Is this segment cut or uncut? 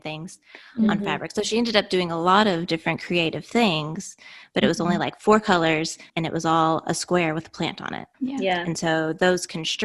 cut